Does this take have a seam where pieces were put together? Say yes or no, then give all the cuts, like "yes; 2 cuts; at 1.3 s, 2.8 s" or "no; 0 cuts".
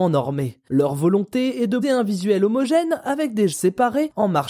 yes; 2 cuts; at 1.8 s, 3.5 s